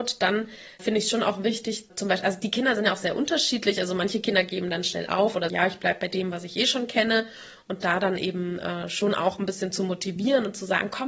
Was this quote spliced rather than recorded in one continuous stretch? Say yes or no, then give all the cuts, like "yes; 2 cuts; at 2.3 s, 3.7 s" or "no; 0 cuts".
yes; 1 cut; at 5.5 s